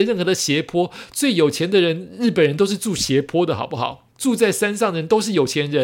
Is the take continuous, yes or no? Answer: no